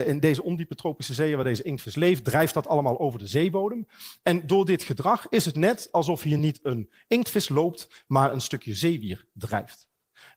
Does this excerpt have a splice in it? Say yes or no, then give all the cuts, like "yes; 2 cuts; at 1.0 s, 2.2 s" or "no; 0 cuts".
no; 0 cuts